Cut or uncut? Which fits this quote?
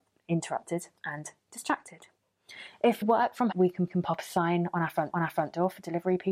cut